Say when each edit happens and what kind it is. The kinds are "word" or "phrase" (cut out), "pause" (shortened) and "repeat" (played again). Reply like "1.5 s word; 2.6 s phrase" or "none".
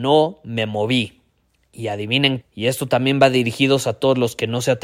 2.4 s word